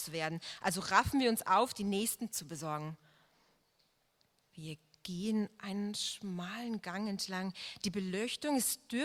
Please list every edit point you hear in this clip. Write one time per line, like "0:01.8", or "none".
0:02.3